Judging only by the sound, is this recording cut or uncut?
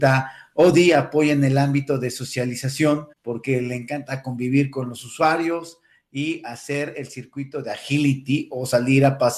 cut